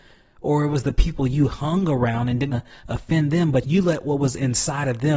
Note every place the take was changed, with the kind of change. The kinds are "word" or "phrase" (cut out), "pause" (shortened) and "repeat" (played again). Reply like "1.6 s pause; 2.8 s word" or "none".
2.5 s word